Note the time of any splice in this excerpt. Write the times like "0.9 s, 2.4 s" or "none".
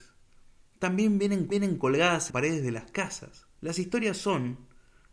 1.5 s, 2.3 s, 3.6 s